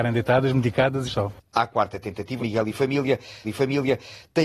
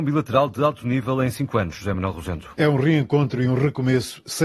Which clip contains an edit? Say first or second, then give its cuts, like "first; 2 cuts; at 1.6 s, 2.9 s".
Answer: first; 3 cuts; at 1.1 s, 2.4 s, 3.4 s